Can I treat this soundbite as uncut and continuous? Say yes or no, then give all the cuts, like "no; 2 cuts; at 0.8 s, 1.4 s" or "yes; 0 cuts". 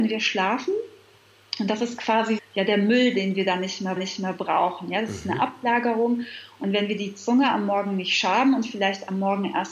no; 2 cuts; at 2.4 s, 4.0 s